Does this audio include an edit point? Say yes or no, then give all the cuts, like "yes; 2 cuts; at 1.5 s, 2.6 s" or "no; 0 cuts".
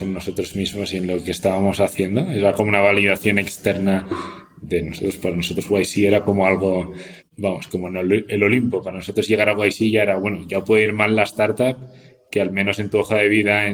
yes; 1 cut; at 7.2 s